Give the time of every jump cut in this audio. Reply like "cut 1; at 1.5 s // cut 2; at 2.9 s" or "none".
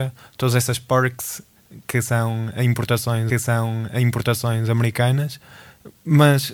cut 1; at 3.3 s